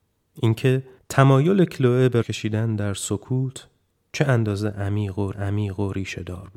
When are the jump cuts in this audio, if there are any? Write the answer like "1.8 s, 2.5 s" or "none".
1.0 s, 2.2 s, 4.0 s, 5.3 s